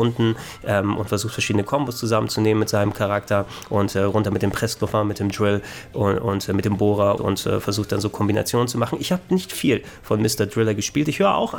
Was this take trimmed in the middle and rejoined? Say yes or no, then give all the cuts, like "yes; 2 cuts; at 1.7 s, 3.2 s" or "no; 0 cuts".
yes; 1 cut; at 7.2 s